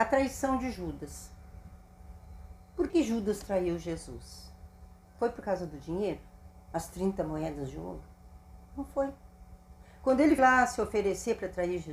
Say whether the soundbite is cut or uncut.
cut